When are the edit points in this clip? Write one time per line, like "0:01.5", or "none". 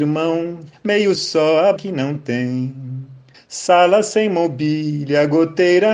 0:01.1
0:01.8
0:03.3